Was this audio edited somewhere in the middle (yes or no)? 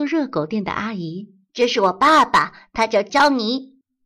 yes